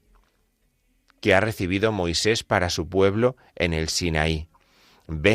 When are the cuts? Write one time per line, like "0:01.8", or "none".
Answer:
none